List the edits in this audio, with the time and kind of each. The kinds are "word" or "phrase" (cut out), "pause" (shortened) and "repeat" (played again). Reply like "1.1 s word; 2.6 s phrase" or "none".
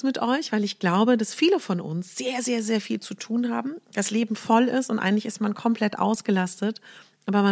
none